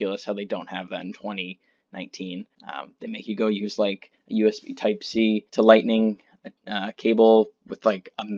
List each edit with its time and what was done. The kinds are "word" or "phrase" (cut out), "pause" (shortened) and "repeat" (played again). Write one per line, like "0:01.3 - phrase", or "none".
0:02.5 - pause
0:05.5 - pause
0:06.6 - pause